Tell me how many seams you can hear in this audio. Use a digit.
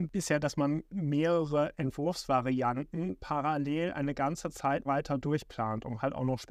1